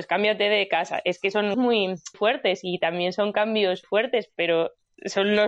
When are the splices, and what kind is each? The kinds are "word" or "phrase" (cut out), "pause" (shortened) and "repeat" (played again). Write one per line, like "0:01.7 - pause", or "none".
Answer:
0:01.5 - word
0:02.1 - word
0:03.8 - word